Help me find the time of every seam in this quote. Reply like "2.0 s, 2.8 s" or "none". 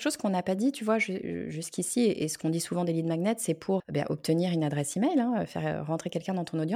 3.8 s